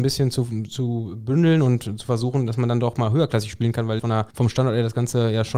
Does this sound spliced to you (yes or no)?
yes